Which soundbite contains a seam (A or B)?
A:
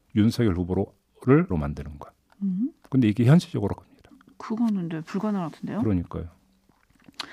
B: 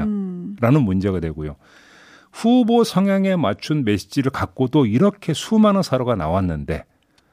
A